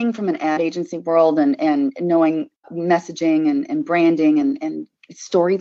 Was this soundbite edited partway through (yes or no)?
no